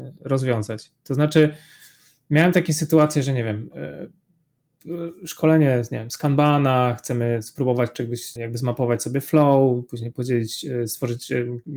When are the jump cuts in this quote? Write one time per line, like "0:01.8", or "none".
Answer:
0:08.4